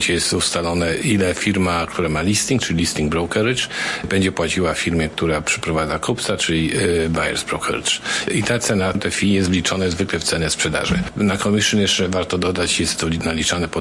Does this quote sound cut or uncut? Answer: uncut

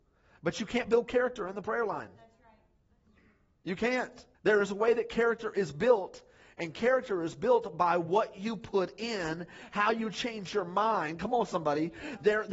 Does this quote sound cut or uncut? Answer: cut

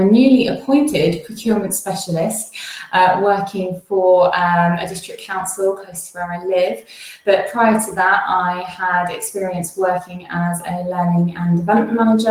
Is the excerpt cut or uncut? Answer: uncut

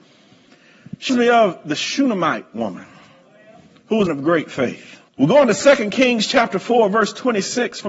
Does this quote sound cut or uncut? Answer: cut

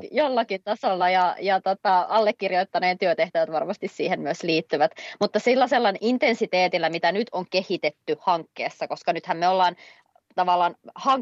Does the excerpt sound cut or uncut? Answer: uncut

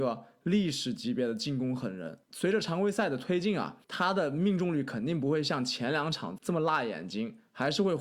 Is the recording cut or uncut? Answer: cut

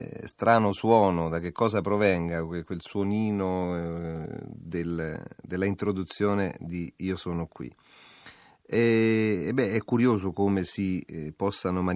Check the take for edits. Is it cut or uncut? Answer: uncut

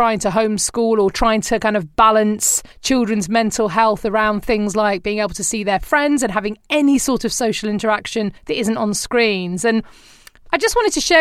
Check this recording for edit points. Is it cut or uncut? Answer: cut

